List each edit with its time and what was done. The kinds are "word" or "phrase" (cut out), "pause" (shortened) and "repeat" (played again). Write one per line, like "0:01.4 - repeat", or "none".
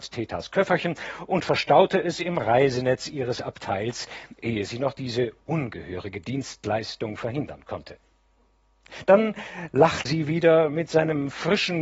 0:10.1 - word